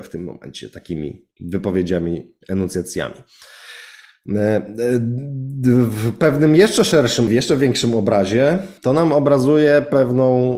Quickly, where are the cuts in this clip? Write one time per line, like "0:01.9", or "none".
0:07.3
0:08.8